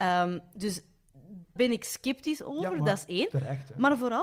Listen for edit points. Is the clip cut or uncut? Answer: cut